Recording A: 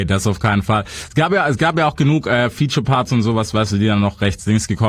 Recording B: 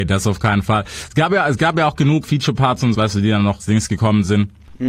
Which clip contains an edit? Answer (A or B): B